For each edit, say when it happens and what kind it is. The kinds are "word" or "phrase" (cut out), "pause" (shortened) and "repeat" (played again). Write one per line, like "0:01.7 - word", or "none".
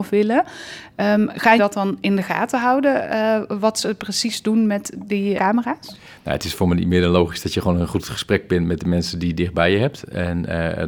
0:01.6 - word
0:05.4 - word